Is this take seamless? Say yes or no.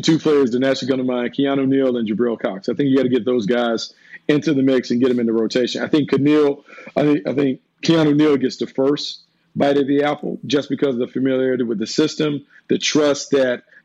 yes